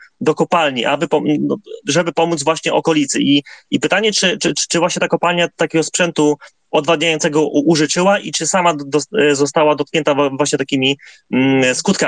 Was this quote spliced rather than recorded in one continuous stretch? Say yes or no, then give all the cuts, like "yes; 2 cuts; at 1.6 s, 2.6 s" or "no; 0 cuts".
no; 0 cuts